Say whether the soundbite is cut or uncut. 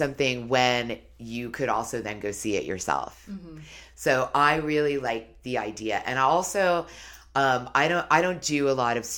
uncut